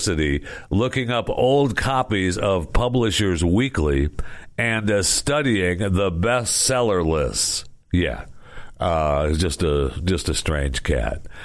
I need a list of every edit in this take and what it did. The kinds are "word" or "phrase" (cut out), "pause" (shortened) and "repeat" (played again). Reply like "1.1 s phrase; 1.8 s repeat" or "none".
7.8 s pause